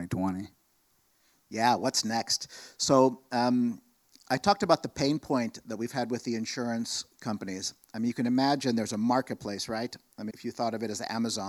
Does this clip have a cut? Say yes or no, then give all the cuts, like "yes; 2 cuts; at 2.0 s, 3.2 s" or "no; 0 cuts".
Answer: yes; 1 cut; at 10.3 s